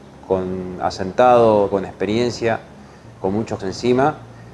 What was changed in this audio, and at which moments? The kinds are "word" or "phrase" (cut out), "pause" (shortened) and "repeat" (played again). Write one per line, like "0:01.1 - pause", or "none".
0:01.7 - word
0:03.2 - word
0:03.6 - word